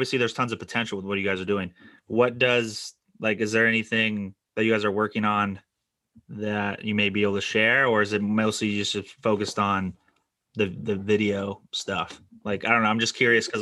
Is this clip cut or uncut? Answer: cut